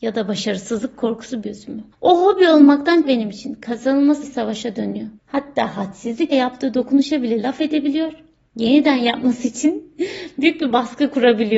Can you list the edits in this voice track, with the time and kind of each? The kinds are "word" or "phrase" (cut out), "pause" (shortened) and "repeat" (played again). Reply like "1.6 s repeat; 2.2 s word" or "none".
1.4 s word; 1.9 s pause; 3.0 s word; 4.2 s word; 5.2 s pause; 6.3 s phrase